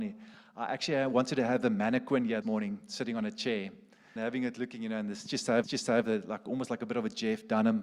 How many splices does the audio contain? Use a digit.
3